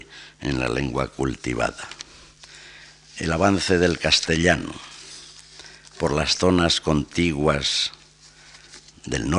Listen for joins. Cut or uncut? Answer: uncut